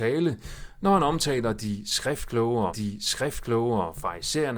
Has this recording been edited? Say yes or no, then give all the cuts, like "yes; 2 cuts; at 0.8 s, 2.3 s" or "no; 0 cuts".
yes; 1 cut; at 2.7 s